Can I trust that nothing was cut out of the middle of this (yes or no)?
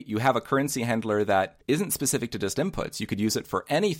no